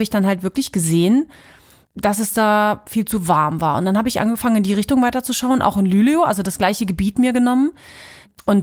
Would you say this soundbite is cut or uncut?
uncut